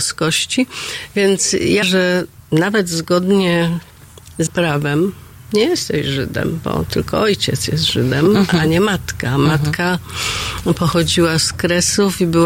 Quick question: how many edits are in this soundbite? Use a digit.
3